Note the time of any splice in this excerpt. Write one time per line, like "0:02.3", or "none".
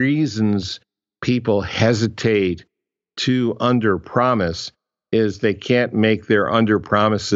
none